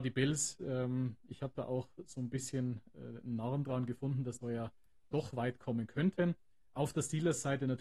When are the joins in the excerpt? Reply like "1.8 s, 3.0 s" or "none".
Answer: 4.4 s